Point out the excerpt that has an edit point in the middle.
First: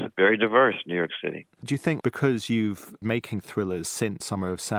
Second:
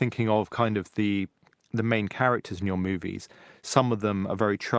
first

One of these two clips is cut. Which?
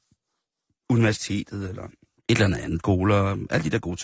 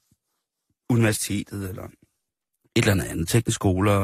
first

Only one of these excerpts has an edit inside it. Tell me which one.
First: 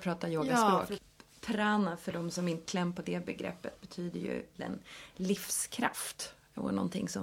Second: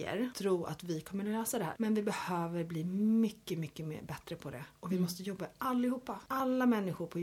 first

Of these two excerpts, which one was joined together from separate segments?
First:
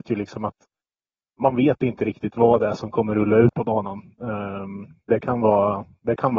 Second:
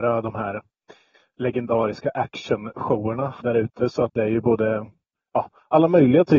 second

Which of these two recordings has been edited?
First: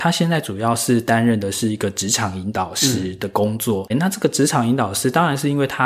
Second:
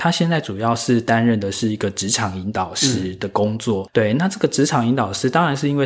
first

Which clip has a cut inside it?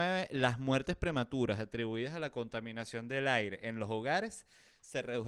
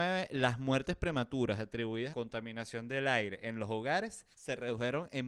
second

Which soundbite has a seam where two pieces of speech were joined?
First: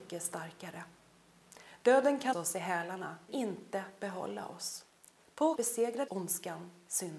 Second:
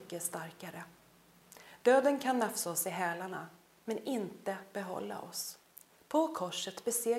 first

